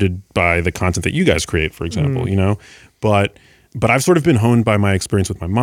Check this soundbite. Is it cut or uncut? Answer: cut